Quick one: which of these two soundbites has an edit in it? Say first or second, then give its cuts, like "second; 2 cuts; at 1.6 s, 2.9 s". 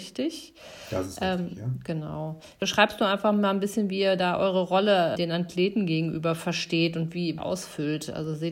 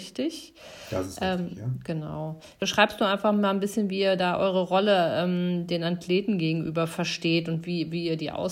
first; 2 cuts; at 5.1 s, 7.4 s